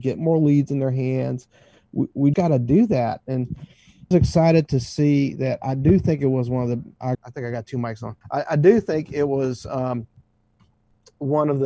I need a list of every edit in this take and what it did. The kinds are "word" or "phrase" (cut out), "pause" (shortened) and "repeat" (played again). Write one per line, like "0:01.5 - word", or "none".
0:02.3 - word
0:04.1 - phrase
0:07.1 - phrase
0:08.2 - pause